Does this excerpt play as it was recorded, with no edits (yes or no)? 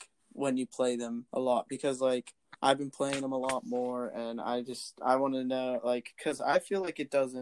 no